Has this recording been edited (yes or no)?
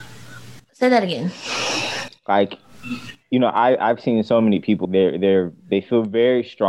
yes